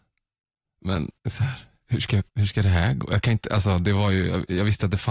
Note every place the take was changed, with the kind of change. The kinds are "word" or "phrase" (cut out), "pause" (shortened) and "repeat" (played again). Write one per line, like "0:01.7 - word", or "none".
0:01.2 - pause
0:02.3 - pause